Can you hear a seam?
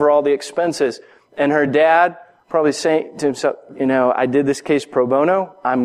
no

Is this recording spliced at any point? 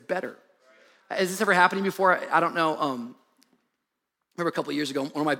no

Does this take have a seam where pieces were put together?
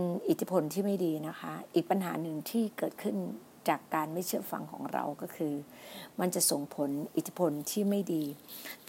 no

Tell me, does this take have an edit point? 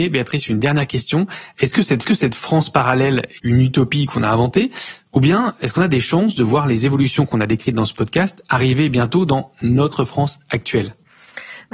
yes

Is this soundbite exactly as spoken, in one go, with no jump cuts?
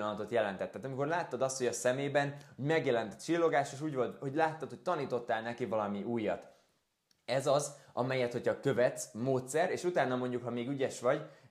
yes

